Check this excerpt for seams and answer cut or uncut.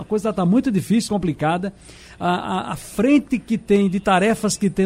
cut